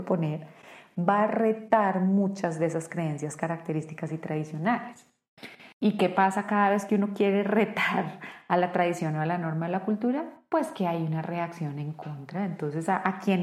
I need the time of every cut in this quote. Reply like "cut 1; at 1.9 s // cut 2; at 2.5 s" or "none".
cut 1; at 5.7 s